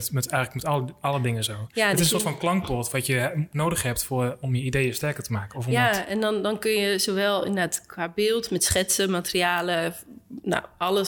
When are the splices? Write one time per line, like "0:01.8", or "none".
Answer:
none